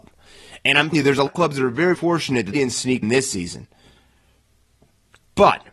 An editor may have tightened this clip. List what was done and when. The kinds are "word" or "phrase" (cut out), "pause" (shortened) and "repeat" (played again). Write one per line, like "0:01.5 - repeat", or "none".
0:00.9 - word
0:01.3 - word
0:01.9 - word
0:02.5 - word
0:03.0 - word